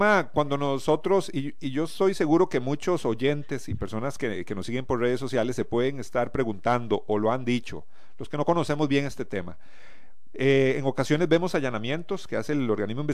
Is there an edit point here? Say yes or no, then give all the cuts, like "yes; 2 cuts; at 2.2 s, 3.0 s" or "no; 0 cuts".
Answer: no; 0 cuts